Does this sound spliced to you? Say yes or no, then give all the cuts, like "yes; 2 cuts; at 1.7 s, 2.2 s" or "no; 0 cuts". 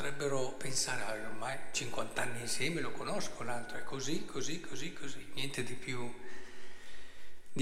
no; 0 cuts